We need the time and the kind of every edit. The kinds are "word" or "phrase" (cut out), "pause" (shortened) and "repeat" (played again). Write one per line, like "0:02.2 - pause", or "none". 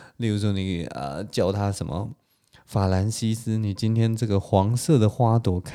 none